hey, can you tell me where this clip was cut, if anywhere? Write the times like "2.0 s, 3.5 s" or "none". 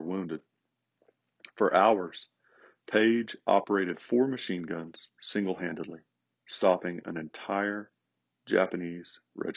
none